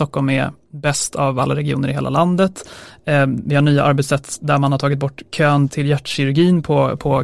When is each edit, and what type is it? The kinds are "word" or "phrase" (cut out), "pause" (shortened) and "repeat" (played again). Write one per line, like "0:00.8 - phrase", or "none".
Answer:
0:05.7 - word